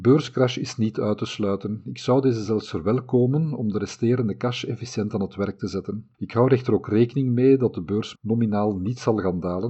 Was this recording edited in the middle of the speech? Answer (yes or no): yes